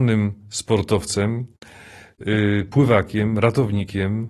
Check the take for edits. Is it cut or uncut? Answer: uncut